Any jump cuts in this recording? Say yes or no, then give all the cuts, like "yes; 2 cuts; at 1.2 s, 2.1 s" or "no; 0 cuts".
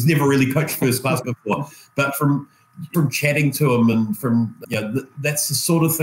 yes; 3 cuts; at 1.2 s, 2.9 s, 4.6 s